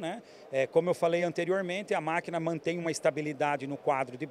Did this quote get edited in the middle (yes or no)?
no